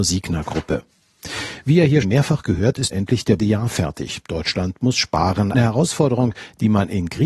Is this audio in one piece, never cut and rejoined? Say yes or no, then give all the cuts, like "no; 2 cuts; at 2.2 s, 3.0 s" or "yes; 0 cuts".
no; 4 cuts; at 2.0 s, 2.9 s, 3.4 s, 5.5 s